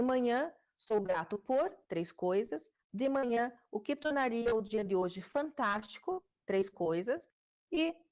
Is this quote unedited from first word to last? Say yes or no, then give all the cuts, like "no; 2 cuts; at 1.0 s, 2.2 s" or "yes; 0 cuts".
no; 2 cuts; at 1.8 s, 2.8 s